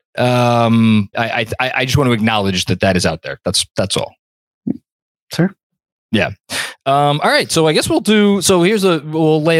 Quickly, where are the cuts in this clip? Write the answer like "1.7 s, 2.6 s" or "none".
1.1 s